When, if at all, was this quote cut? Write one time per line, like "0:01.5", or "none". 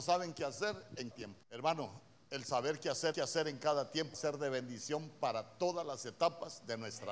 0:01.1
0:01.4
0:03.1
0:04.1